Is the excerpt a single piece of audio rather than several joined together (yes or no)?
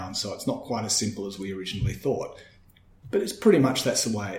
yes